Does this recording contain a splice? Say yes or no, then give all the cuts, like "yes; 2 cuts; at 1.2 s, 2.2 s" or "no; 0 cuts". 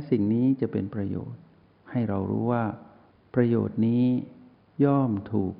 no; 0 cuts